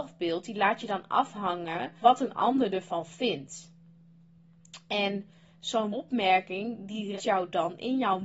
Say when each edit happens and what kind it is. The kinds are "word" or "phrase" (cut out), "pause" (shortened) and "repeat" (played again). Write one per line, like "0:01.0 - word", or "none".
0:02.0 - word
0:05.9 - word
0:07.2 - word